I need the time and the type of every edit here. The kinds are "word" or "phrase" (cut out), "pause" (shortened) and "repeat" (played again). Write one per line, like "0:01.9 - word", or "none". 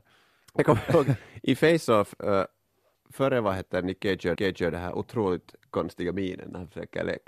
0:02.9 - word
0:04.4 - repeat